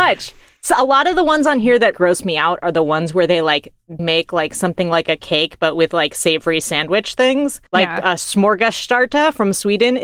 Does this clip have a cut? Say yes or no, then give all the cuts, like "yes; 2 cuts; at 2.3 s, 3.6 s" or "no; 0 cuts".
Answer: yes; 3 cuts; at 1.9 s, 4.0 s, 7.7 s